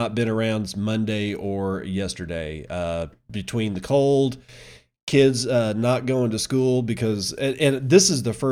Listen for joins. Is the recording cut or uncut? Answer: uncut